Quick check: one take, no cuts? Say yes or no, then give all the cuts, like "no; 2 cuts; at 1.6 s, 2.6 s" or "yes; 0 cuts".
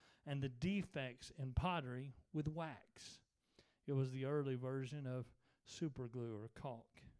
yes; 0 cuts